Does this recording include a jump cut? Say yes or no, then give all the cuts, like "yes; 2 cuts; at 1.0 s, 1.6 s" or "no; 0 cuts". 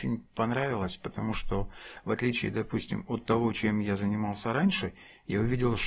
no; 0 cuts